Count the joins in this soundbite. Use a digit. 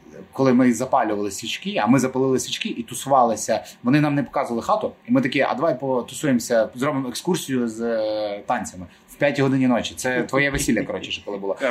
0